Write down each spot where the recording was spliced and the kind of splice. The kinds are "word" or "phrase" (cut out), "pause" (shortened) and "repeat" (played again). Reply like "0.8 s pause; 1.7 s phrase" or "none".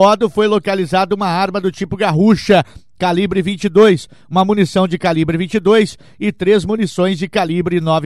none